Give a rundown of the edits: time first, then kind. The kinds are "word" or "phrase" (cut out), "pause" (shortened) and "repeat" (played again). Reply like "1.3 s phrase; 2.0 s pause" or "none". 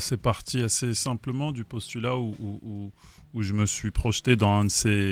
none